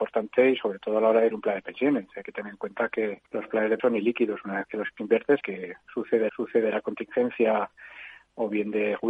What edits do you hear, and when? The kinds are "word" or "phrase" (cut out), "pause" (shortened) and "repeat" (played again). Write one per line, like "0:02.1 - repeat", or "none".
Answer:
0:01.3 - word
0:03.3 - pause
0:03.8 - word
0:05.4 - word
0:06.3 - repeat